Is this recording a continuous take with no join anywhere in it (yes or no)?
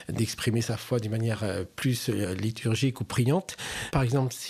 yes